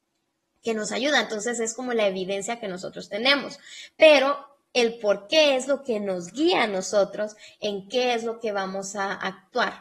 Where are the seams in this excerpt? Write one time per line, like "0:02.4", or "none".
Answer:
none